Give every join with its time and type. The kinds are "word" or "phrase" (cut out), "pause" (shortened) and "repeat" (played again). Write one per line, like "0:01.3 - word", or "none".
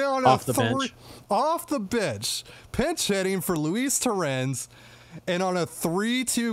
none